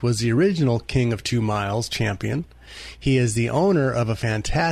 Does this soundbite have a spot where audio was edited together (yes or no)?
no